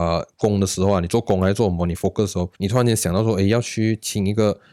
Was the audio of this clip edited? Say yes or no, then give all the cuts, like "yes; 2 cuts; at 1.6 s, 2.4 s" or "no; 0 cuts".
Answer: yes; 1 cut; at 2.5 s